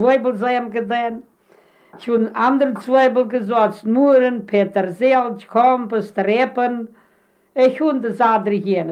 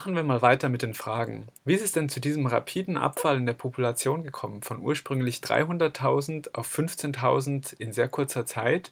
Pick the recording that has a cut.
second; 1 cut; at 1.6 s

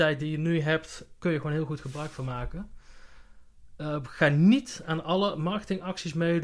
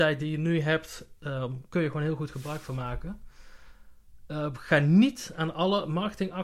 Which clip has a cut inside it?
first; 1 cut; at 1.2 s

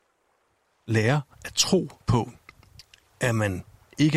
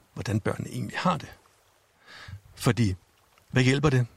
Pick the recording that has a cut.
first; 2 cuts; at 1.3 s, 2.0 s

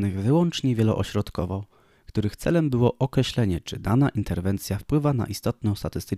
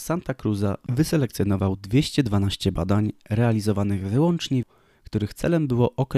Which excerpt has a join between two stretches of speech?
second; 1 cut; at 4.6 s

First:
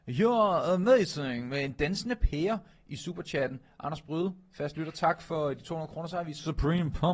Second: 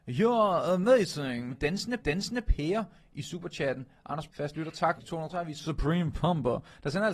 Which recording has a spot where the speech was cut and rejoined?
second; 5 cuts; at 1.5 s, 2.0 s, 4.3 s, 5.0 s, 5.3 s

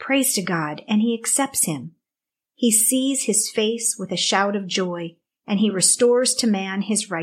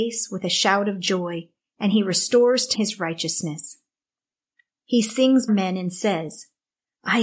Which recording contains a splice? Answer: second; 2 cuts; at 2.7 s, 5.5 s

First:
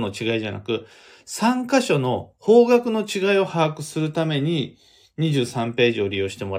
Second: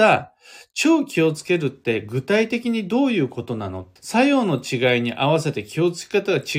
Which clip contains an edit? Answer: second; 1 cut; at 4.0 s

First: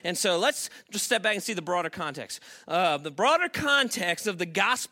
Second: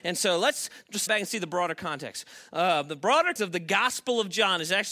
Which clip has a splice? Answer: second; 2 cuts; at 1.1 s, 3.4 s

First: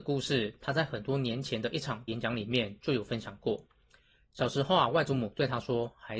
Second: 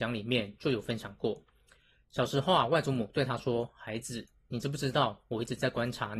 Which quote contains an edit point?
first; 1 cut; at 2.1 s

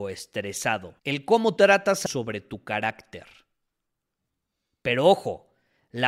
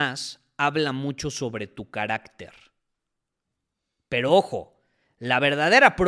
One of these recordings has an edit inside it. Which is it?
first; 3 cuts; at 1.0 s, 1.6 s, 2.1 s

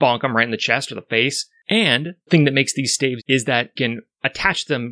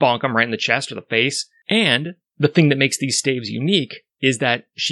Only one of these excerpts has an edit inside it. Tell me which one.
first; 3 cuts; at 2.3 s, 3.2 s, 3.8 s

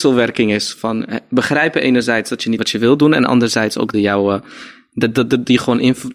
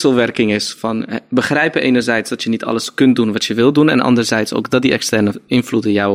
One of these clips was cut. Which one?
first; 2 cuts; at 2.6 s, 3.9 s

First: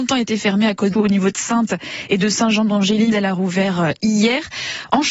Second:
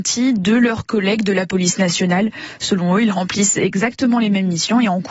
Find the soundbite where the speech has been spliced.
first; 2 cuts; at 0.9 s, 3.1 s

